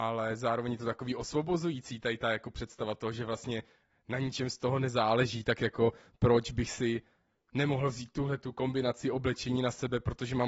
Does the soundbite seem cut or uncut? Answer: uncut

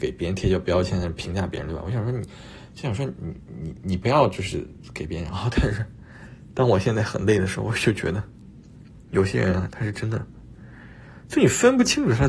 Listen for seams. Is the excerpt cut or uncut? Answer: uncut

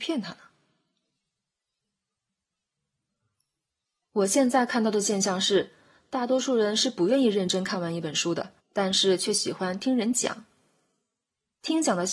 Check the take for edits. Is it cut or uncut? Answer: cut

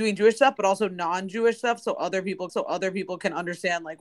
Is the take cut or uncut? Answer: cut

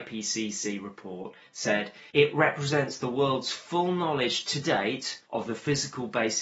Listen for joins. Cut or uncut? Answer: cut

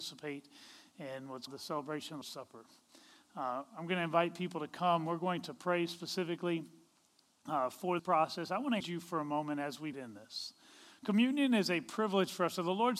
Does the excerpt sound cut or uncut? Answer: cut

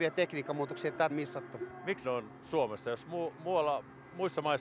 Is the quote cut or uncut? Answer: cut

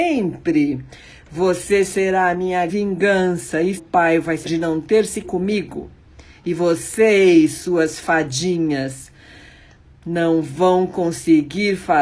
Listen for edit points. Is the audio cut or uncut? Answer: cut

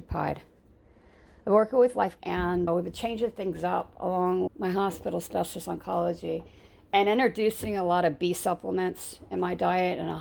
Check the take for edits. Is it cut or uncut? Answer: cut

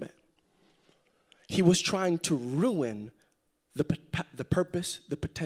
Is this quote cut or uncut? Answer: uncut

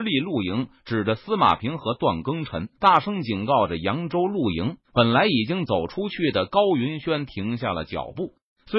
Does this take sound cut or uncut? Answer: cut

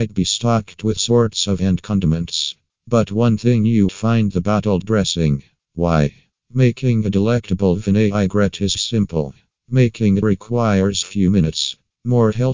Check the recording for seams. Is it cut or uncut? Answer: cut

